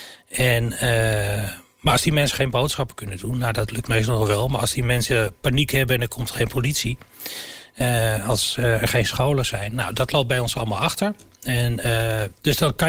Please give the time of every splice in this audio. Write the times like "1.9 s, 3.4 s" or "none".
none